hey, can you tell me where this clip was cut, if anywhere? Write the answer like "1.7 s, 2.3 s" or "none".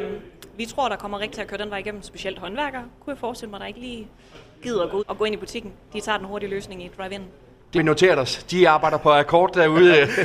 1.3 s, 5.0 s, 7.7 s

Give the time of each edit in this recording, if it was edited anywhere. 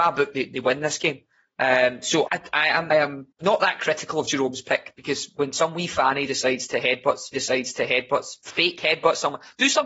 2.3 s, 2.9 s, 3.3 s, 7.3 s

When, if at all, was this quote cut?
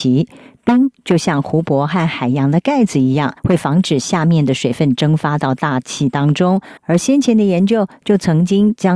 3.4 s, 6.8 s

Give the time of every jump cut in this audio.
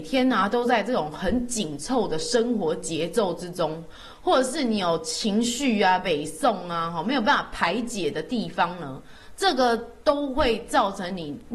none

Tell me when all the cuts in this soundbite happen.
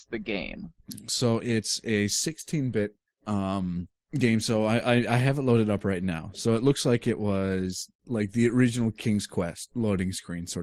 none

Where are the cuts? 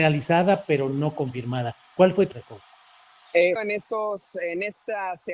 2.3 s, 3.6 s

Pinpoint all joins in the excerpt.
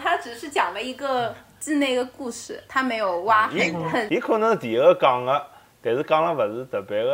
2.7 s

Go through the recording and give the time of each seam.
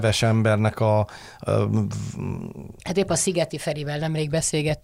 2.8 s

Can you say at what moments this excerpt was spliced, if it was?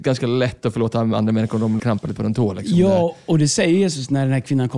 1.8 s, 2.2 s

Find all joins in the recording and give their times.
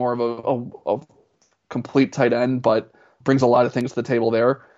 3.2 s

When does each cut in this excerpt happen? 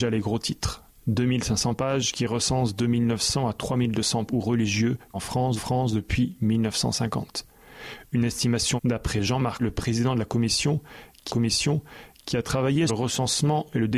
4.3 s, 5.1 s, 5.6 s, 8.8 s, 9.6 s, 11.3 s, 12.9 s

